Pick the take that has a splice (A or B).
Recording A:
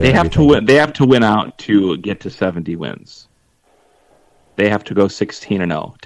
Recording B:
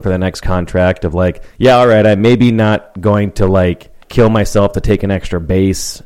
B